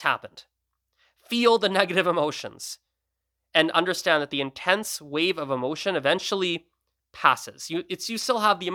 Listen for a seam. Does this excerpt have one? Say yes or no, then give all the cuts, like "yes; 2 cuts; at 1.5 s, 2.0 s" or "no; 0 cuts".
no; 0 cuts